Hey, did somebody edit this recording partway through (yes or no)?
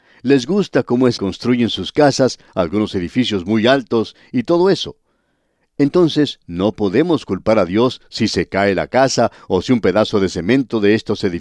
yes